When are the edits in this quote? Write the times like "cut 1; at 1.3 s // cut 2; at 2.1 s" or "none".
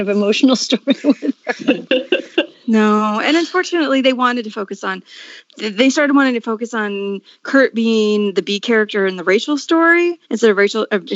cut 1; at 10.2 s